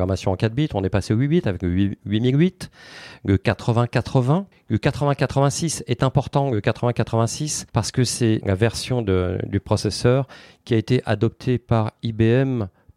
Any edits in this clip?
yes; 3 cuts; at 4.5 s, 7.7 s, 8.4 s

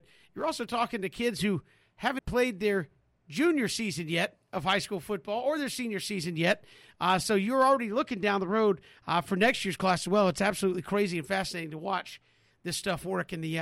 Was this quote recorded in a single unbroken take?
no; 1 cut; at 2.2 s

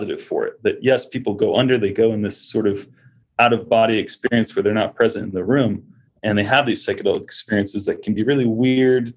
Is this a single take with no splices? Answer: yes; 0 cuts

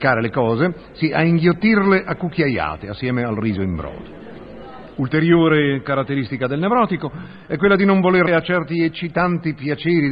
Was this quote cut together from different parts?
yes; 1 cut; at 8.3 s

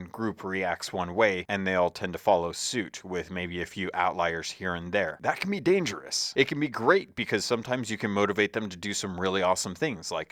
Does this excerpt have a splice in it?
no; 0 cuts

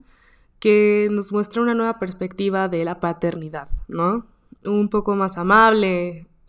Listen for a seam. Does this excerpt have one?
no; 0 cuts

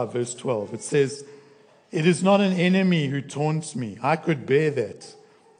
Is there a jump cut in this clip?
no; 0 cuts

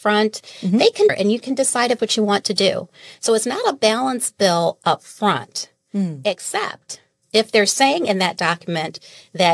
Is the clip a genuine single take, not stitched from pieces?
no; 3 cuts; at 1.1 s, 2.0 s, 7.2 s

